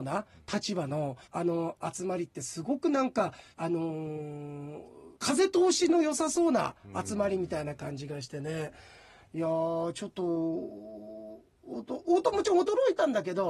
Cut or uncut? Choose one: cut